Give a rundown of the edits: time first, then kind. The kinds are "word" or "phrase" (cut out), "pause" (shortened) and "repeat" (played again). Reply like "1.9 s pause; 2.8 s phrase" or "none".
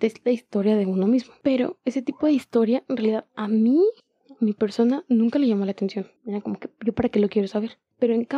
4.0 s pause; 6.2 s pause